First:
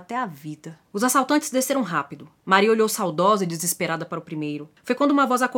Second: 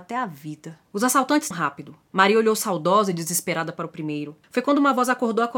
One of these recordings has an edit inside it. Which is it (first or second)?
second